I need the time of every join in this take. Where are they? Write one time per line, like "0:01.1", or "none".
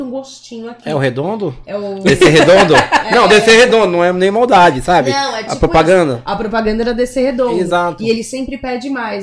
none